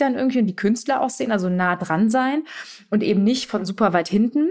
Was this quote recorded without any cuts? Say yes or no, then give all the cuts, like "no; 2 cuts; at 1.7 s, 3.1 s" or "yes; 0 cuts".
yes; 0 cuts